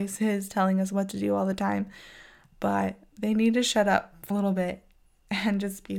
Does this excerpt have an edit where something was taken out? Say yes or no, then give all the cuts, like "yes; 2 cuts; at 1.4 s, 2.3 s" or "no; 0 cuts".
yes; 1 cut; at 4.3 s